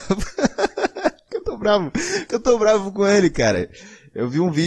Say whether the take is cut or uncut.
uncut